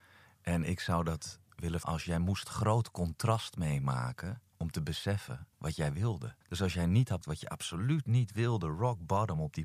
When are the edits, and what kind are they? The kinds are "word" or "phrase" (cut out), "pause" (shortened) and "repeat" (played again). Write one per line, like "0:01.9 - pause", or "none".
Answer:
0:01.8 - word
0:04.5 - pause
0:05.5 - pause
0:06.4 - pause
0:07.2 - word